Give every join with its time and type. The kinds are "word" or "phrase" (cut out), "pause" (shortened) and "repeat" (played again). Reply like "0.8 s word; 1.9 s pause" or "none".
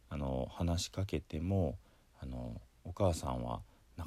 none